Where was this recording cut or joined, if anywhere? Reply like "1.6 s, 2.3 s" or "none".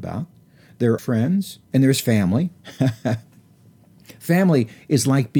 1.0 s, 1.6 s